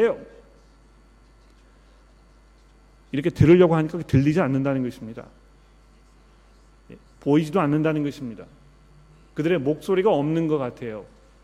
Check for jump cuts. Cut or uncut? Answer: uncut